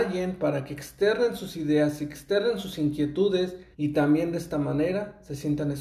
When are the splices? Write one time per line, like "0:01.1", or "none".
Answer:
0:03.7